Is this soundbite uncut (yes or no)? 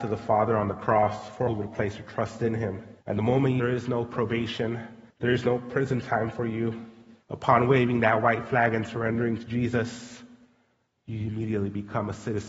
no